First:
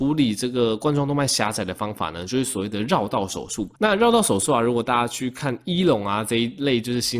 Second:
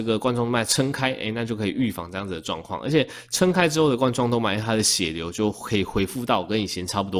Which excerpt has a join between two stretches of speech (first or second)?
first